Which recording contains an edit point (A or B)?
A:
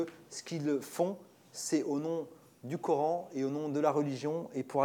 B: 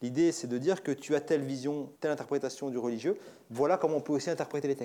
B